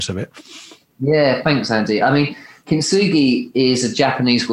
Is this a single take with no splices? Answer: yes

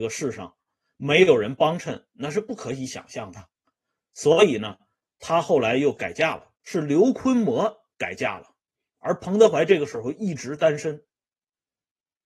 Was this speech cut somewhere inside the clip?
yes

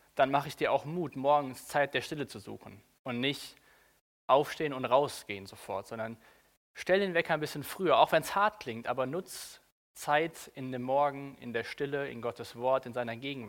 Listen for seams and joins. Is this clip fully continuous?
yes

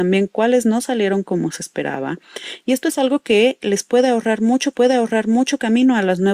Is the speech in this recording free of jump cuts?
no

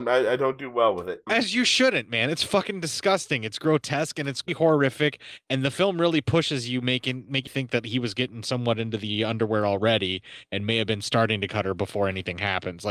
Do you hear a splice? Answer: yes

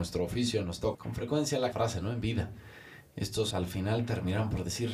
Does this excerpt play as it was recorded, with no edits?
no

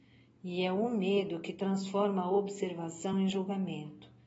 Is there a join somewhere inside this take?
no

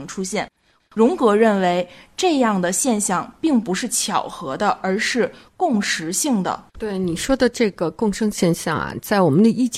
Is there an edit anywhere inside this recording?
yes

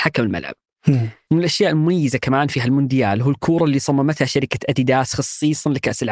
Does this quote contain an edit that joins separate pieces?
no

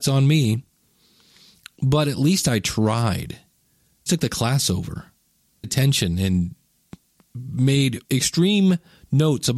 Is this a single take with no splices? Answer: no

